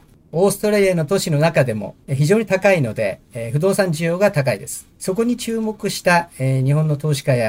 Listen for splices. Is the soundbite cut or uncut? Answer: cut